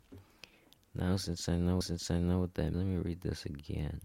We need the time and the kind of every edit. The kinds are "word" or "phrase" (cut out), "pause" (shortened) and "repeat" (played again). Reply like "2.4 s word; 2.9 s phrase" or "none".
1.8 s repeat; 2.7 s word